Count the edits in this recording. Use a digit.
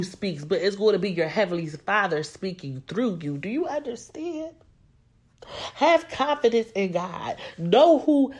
0